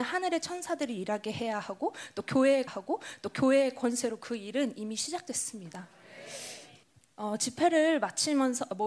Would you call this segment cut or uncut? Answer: cut